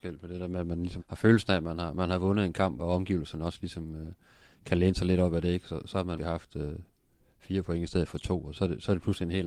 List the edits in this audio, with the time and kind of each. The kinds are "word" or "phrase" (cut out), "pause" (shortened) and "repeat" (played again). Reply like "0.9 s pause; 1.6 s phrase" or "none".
1.0 s word; 2.8 s word; 6.2 s word; 8.5 s word